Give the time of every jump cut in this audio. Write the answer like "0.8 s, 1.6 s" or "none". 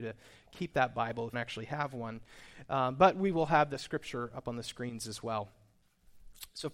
1.3 s